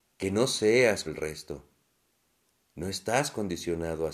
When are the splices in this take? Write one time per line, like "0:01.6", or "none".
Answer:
0:01.1